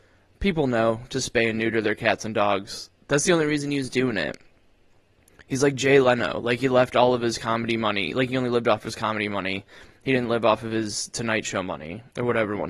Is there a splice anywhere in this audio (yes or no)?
no